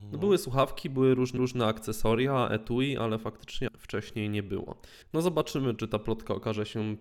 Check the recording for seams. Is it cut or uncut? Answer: cut